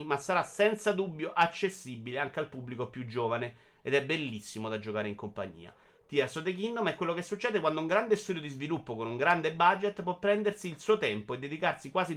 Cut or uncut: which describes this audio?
uncut